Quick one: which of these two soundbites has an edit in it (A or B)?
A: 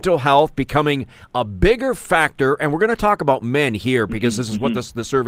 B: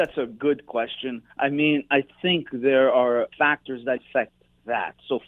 B